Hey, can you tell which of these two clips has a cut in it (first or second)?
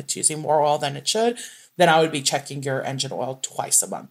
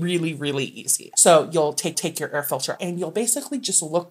second